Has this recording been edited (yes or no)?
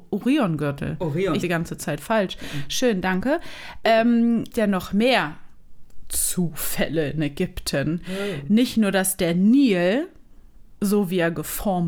yes